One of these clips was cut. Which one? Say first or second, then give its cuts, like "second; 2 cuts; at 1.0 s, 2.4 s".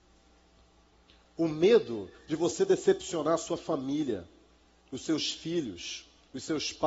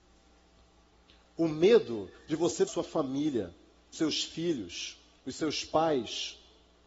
second; 2 cuts; at 2.7 s, 3.9 s